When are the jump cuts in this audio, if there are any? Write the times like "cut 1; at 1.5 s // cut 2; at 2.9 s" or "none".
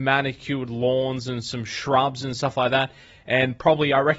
none